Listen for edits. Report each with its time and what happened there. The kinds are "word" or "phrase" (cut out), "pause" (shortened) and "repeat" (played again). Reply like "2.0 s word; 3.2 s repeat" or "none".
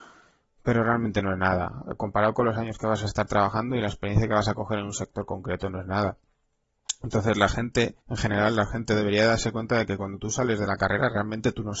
8.0 s pause